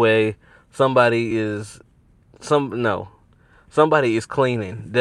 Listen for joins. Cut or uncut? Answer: uncut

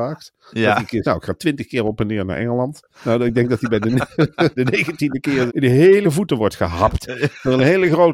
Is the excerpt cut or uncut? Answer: cut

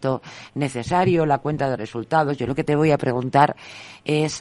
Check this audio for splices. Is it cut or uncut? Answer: uncut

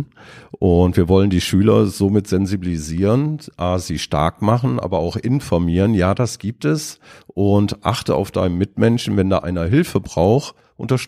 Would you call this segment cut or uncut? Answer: uncut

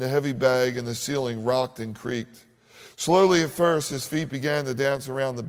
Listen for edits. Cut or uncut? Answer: uncut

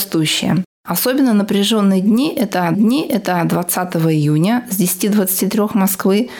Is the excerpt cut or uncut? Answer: cut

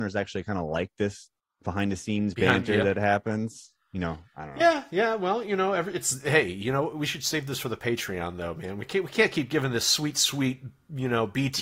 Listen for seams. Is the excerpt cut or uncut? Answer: uncut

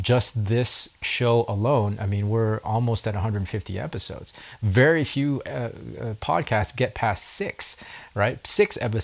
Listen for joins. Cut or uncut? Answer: cut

